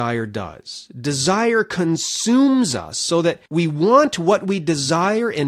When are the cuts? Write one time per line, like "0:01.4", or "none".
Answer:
0:03.5